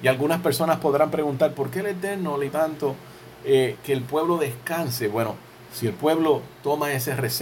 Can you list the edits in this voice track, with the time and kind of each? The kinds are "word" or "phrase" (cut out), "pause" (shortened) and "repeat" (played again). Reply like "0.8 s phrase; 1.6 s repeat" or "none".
2.5 s word